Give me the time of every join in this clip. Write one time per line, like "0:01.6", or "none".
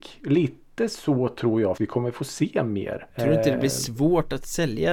0:01.8
0:03.1

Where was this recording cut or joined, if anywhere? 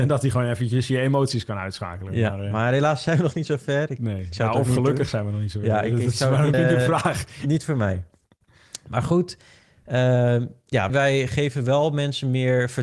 0:06.5
0:10.9

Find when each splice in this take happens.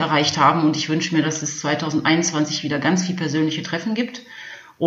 none

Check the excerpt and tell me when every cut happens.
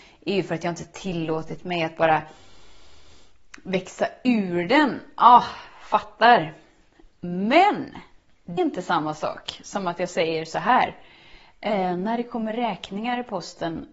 0:08.6

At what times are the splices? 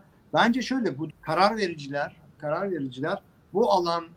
0:01.1
0:02.4

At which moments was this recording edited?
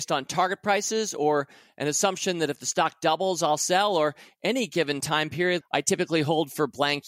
0:05.6

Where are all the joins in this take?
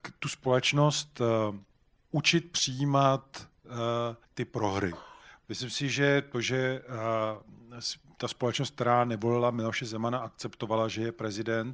0:04.2

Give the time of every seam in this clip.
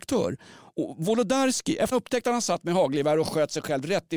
0:01.9

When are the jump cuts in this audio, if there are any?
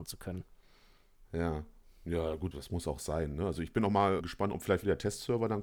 0:02.5
0:04.2

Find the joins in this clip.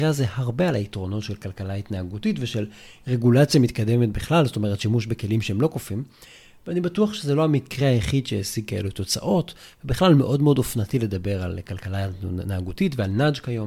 none

